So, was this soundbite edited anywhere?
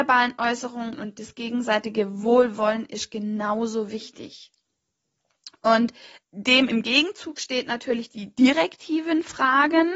yes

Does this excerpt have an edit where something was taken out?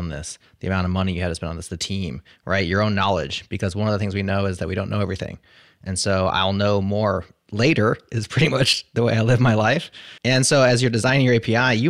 yes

